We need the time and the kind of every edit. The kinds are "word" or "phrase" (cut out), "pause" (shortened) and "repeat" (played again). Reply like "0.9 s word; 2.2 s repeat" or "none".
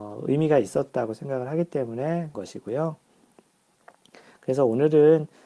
2.3 s word